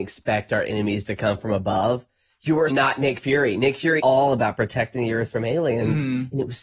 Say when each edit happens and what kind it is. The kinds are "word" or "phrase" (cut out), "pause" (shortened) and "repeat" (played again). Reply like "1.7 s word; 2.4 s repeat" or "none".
2.7 s word; 4.0 s word